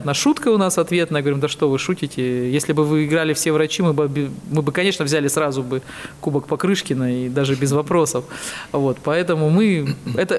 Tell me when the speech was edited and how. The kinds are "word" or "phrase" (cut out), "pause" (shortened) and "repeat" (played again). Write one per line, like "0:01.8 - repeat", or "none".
none